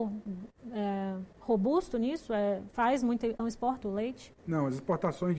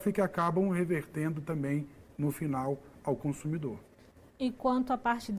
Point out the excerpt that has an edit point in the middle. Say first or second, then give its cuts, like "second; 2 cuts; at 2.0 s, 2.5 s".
first; 3 cuts; at 1.3 s, 3.4 s, 3.8 s